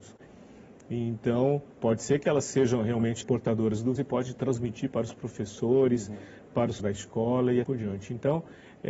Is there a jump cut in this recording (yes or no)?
yes